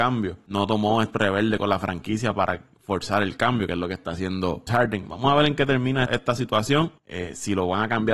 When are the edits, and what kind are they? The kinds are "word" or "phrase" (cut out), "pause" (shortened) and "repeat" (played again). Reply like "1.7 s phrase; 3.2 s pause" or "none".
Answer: 1.1 s word; 4.7 s word; 6.1 s word